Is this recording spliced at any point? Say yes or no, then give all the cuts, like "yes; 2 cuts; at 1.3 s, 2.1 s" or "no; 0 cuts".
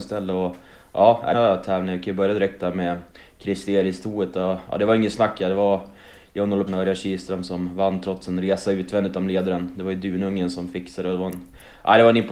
yes; 2 cuts; at 1.3 s, 6.7 s